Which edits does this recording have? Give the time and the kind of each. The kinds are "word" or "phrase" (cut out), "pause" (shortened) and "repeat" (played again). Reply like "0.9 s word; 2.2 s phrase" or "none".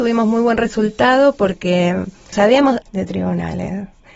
2.3 s word; 2.8 s phrase